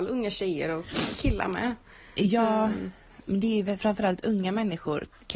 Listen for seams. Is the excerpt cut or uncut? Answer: uncut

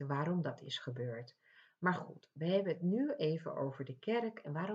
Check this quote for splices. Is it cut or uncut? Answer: uncut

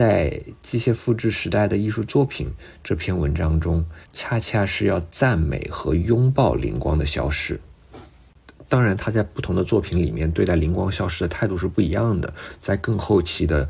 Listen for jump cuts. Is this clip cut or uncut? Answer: cut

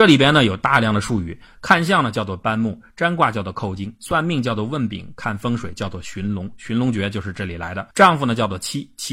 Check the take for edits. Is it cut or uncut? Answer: cut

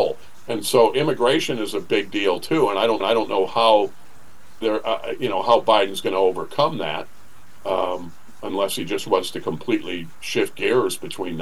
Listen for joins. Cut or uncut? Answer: cut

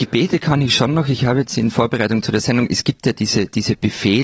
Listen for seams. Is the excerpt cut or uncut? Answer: uncut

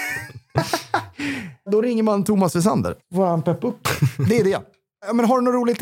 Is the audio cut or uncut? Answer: uncut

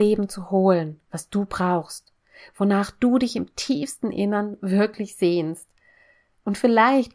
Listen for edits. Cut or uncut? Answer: uncut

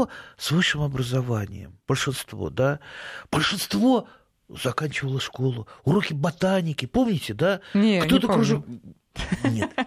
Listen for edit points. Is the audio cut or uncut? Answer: uncut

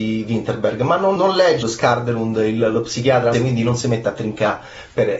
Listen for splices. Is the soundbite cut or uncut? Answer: cut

